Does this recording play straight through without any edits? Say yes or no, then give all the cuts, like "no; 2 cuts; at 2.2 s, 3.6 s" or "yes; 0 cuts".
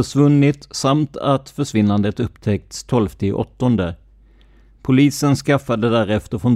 yes; 0 cuts